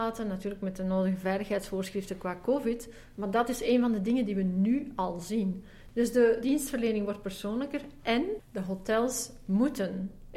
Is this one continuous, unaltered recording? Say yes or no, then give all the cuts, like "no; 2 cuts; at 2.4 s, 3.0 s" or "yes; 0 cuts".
no; 1 cut; at 6.4 s